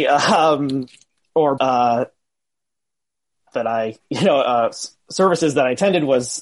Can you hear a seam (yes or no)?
yes